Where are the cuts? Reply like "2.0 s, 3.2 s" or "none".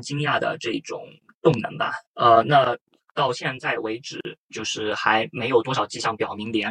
2.0 s

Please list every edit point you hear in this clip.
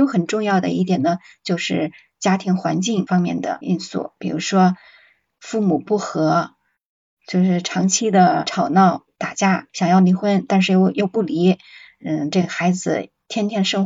none

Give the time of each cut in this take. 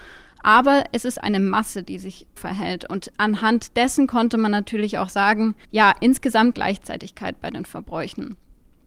1.2 s, 2.4 s, 5.6 s, 6.5 s

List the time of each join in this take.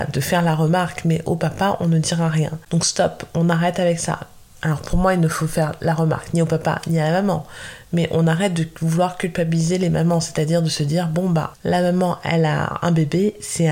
none

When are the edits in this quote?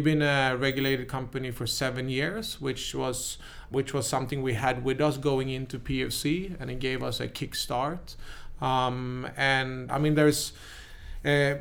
3.7 s, 9.9 s

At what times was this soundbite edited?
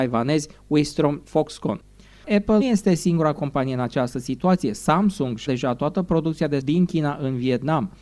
1.2 s, 2.6 s, 5.5 s, 6.6 s

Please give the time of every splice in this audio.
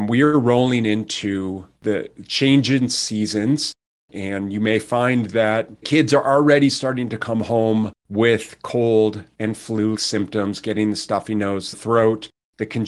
5.8 s, 8.0 s, 9.9 s, 11.7 s

